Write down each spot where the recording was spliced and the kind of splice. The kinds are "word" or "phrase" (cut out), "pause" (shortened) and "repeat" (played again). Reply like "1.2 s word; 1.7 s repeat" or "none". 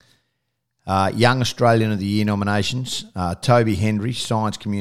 none